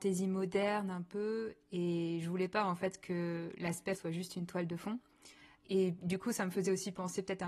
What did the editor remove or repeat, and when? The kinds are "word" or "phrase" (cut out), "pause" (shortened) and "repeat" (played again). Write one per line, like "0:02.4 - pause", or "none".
0:04.0 - word